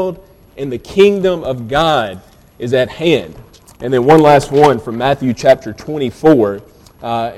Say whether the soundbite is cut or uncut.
uncut